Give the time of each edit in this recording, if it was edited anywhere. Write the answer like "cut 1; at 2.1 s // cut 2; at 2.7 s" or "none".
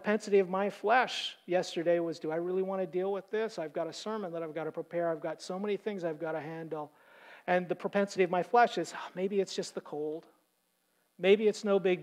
none